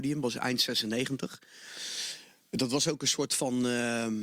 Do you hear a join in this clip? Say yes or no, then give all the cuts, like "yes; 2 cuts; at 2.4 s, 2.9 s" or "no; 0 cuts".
no; 0 cuts